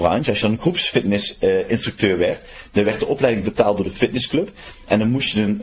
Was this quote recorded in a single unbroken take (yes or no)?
yes